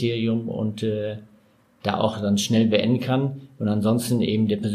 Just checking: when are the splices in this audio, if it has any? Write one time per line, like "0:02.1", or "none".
none